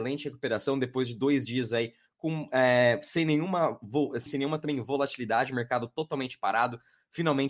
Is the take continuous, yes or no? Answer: no